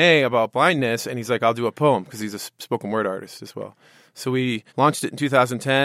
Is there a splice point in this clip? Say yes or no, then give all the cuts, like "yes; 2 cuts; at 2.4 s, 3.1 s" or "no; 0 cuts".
yes; 1 cut; at 4.7 s